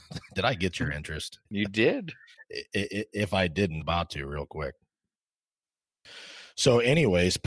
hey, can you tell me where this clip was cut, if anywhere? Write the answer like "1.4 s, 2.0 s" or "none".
1.5 s, 3.8 s